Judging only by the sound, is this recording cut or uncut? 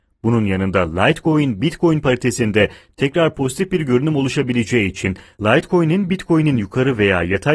uncut